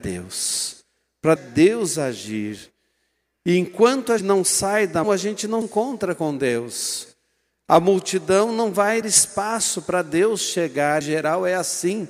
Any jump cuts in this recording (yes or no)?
yes